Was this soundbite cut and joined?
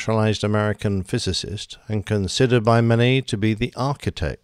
no; 0 cuts

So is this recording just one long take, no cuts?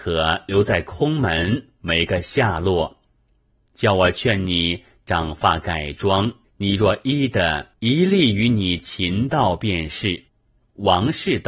no; 3 cuts; at 6.4 s, 7.7 s, 10.3 s

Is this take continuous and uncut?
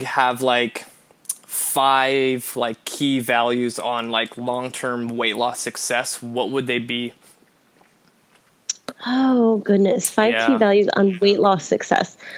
yes; 0 cuts

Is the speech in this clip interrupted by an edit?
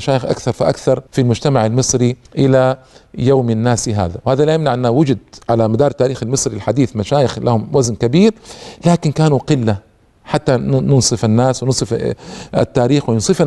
yes; 2 cuts; at 1.1 s, 2.3 s

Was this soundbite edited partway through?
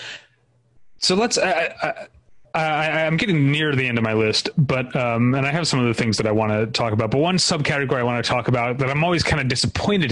no; 0 cuts

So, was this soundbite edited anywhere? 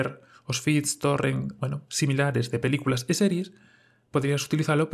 no; 0 cuts

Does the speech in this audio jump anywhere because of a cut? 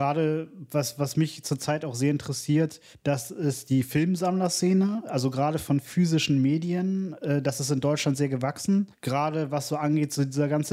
yes; 2 cuts; at 2.9 s, 8.9 s

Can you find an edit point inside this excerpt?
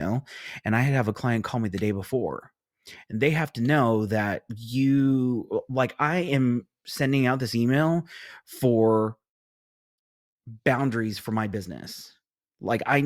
no; 0 cuts

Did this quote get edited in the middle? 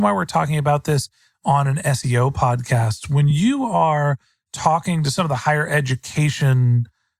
no; 0 cuts

